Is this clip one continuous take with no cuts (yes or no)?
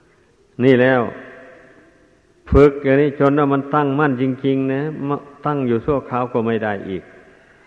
yes